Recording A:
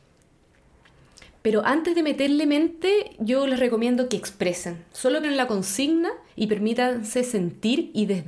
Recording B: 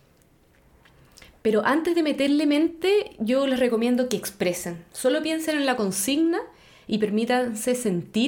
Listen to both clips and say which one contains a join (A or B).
A